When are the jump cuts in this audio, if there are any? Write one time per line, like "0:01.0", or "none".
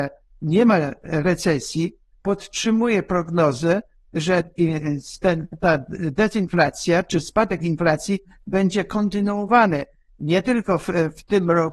none